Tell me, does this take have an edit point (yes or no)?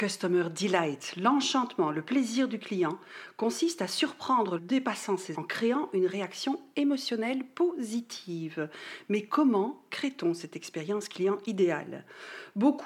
yes